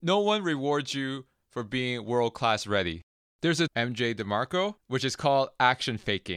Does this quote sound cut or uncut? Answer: cut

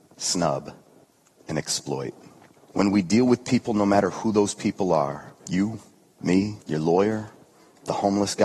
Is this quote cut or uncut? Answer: cut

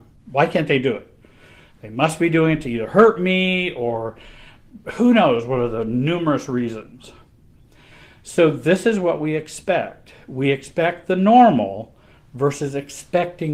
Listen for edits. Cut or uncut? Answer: uncut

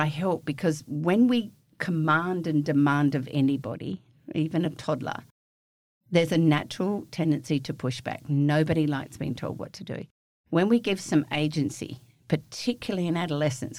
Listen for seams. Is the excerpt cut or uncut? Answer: uncut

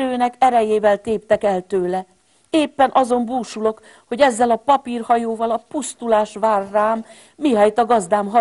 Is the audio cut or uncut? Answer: uncut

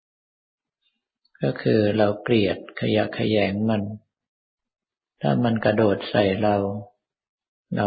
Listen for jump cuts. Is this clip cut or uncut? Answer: uncut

